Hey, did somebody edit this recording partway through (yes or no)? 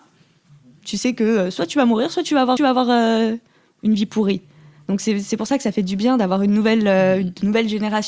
yes